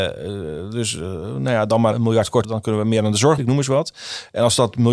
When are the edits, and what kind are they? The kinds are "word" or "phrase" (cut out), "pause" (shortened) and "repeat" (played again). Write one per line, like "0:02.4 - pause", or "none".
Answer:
0:01.9 - word
0:02.4 - phrase
0:03.4 - word

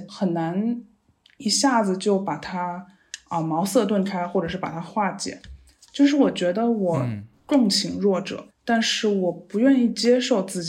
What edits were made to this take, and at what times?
0:08.5 - word

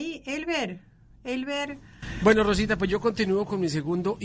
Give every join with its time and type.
none

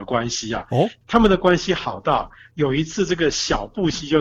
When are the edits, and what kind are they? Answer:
none

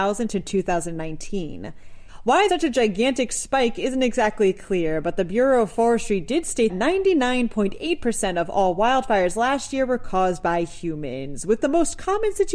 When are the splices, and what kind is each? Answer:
0:02.5 - word
0:06.7 - word

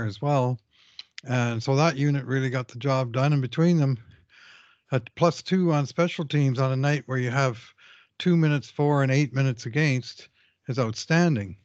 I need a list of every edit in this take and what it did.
none

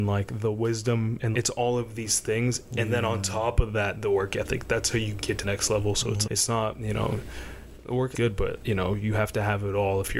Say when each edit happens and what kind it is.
0:01.3 - word
0:05.4 - word
0:06.2 - word
0:08.1 - word

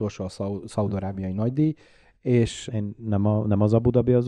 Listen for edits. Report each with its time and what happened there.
0:02.7 - word

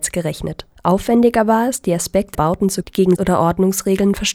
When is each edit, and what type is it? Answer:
0:02.3 - word
0:02.8 - word
0:03.2 - word

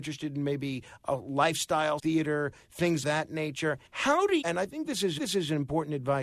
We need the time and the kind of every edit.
0:02.0 - word
0:03.0 - word
0:03.9 - pause
0:04.4 - word
0:05.2 - repeat

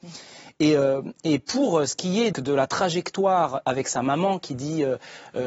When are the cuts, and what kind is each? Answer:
0:02.3 - word

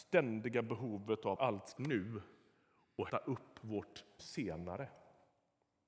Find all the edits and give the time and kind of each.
0:01.4 - word
0:01.8 - word
0:03.1 - word
0:04.2 - word

